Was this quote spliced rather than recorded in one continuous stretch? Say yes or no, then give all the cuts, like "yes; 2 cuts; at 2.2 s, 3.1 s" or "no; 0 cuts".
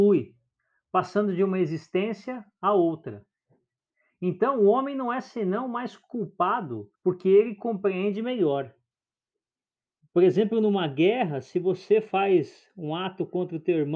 yes; 1 cut; at 7.0 s